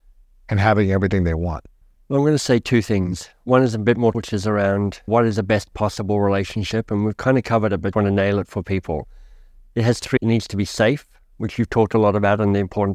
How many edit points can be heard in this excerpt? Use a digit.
5